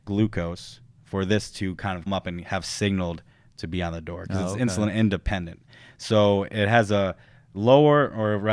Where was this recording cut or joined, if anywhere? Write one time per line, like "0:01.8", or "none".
0:02.1